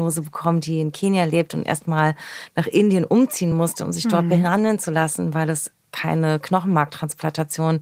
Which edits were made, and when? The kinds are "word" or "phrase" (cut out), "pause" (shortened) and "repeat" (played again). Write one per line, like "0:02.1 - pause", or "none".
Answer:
none

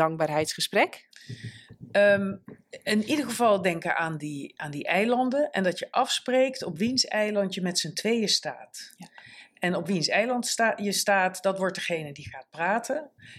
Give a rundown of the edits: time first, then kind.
none

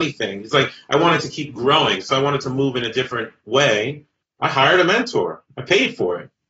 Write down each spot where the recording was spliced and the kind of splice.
0:04.3 - pause

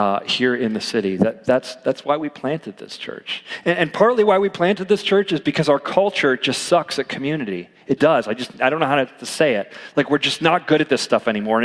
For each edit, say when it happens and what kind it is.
0:08.0 - word

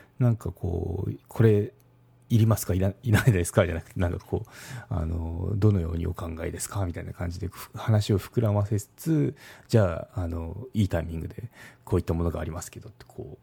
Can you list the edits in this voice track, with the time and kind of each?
0:01.2 - pause

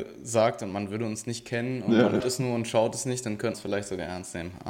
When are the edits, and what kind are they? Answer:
0:02.2 - word
0:03.5 - word

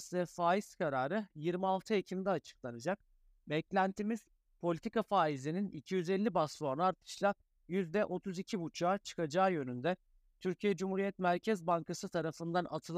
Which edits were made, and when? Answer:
none

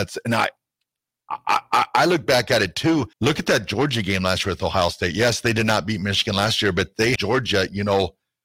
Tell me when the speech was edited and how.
0:03.1 - pause
0:07.2 - word

